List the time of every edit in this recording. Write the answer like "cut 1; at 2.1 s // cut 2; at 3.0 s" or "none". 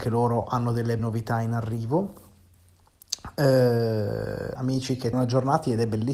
cut 1; at 1.0 s // cut 2; at 4.6 s // cut 3; at 5.1 s